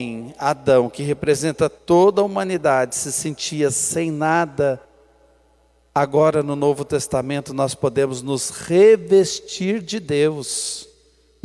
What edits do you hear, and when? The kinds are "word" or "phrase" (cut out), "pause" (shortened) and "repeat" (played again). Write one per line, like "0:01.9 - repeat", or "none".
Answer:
none